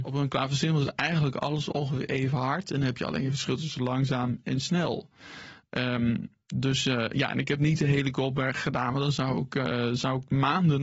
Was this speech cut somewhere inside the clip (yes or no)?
no